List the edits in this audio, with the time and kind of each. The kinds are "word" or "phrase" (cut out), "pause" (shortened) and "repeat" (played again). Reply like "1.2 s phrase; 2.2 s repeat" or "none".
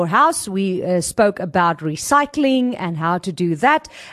none